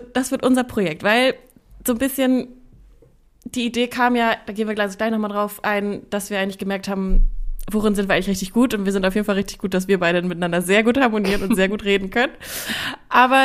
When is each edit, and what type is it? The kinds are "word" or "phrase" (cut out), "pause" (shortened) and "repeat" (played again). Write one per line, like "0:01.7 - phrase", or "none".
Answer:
none

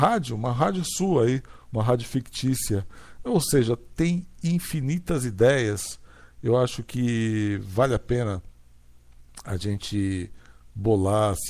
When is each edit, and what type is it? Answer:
none

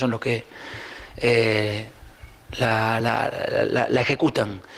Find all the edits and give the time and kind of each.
none

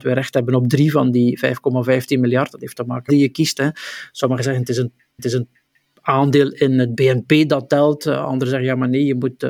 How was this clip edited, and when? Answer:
0:03.1 - phrase
0:05.2 - repeat

